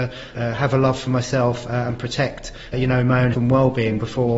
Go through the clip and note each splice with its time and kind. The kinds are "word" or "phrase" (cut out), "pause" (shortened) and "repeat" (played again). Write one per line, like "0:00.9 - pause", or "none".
0:02.7 - word
0:03.3 - word